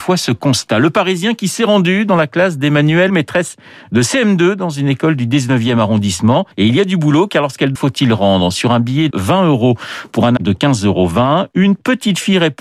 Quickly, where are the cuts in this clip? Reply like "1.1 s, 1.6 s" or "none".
3.1 s, 6.5 s, 7.8 s, 9.1 s, 10.4 s